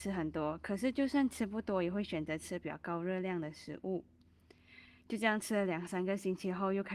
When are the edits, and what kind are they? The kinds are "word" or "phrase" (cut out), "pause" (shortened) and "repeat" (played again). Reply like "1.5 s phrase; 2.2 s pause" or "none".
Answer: none